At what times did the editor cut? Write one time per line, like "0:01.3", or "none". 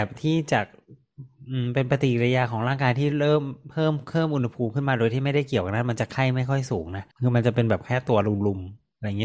0:07.1

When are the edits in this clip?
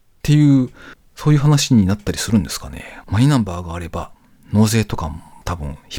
0:03.0

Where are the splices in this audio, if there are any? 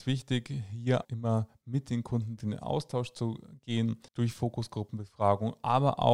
0:01.0
0:02.4
0:04.1

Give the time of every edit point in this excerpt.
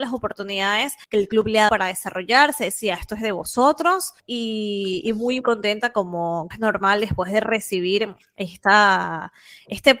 0:01.0
0:01.7
0:04.2
0:05.4
0:06.5

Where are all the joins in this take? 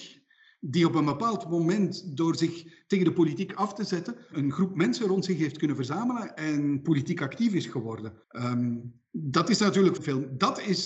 0:04.3
0:08.2
0:10.0

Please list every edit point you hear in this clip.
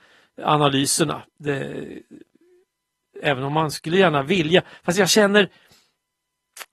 none

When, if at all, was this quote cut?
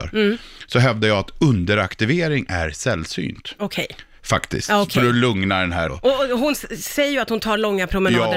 0:05.9

